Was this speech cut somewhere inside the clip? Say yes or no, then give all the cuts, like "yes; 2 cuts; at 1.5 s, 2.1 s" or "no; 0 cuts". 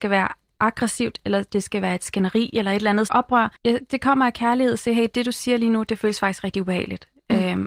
yes; 2 cuts; at 3.1 s, 3.6 s